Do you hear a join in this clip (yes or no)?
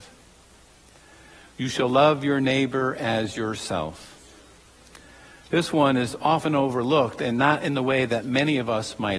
no